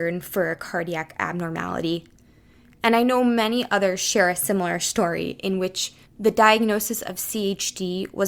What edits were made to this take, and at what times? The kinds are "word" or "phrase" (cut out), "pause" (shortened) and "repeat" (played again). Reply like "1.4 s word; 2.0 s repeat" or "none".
none